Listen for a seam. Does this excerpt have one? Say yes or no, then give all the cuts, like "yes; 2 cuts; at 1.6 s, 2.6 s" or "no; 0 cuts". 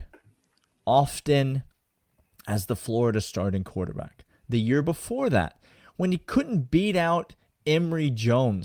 no; 0 cuts